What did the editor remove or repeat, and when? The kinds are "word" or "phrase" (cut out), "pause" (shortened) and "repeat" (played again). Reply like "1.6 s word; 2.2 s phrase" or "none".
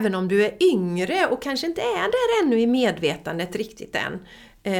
none